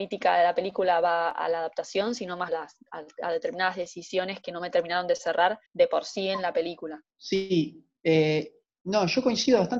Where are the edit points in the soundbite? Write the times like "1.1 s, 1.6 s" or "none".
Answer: 2.5 s, 5.7 s, 7.1 s